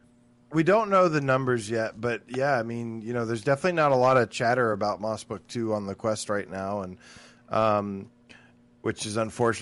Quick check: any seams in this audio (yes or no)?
no